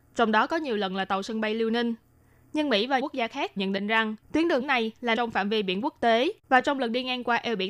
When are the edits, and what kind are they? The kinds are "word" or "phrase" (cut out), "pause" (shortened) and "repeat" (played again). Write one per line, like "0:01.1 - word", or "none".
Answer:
0:03.0 - word
0:03.6 - word
0:04.2 - pause
0:04.6 - word
0:05.2 - word
0:06.4 - pause